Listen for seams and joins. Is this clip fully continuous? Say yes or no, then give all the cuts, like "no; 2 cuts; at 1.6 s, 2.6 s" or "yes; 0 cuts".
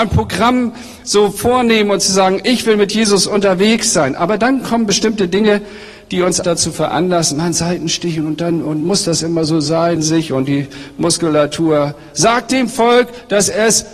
no; 2 cuts; at 6.4 s, 10.0 s